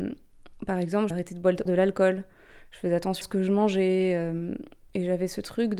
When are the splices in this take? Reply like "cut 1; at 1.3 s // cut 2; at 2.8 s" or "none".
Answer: cut 1; at 1.1 s // cut 2; at 1.7 s // cut 3; at 3.2 s